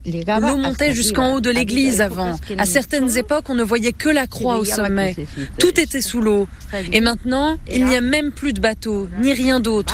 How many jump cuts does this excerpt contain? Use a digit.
0